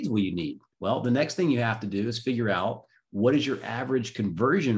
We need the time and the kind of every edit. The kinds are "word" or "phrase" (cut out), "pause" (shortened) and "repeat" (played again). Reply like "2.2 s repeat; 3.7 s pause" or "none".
none